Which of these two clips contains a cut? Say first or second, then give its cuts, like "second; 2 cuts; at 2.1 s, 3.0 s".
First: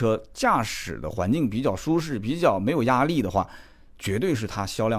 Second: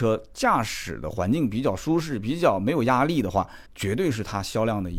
second; 1 cut; at 3.7 s